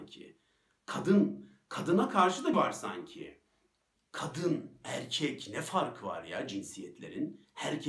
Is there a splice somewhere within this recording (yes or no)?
yes